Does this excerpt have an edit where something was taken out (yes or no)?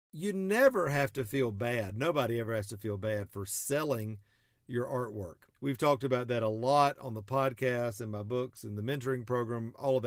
yes